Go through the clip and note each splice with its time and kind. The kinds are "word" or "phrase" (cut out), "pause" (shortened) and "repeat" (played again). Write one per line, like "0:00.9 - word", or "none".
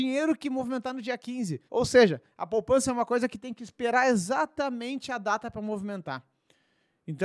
0:01.7 - pause